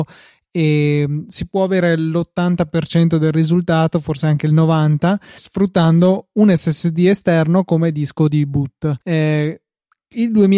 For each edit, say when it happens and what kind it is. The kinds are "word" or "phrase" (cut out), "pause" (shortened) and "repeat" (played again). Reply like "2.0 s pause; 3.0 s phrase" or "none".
5.4 s word; 9.0 s pause